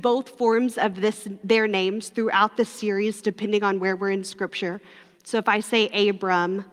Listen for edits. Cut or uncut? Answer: uncut